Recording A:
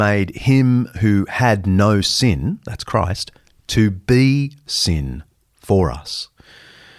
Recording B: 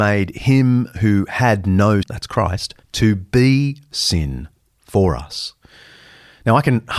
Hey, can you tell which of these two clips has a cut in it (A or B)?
B